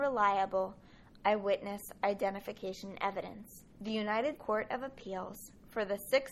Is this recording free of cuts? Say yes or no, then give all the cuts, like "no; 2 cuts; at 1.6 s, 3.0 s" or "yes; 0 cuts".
no; 2 cuts; at 3.7 s, 4.4 s